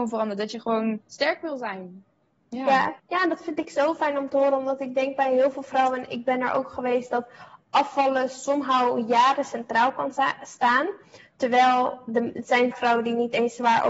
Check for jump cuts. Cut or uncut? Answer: cut